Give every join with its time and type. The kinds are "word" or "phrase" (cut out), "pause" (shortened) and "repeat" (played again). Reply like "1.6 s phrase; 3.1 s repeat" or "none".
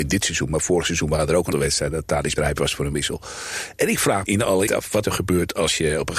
1.5 s word; 2.4 s word; 4.2 s word; 4.7 s word; 5.0 s word